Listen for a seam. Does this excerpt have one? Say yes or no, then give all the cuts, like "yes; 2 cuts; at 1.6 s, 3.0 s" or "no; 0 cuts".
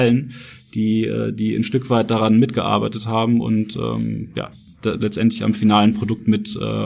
no; 0 cuts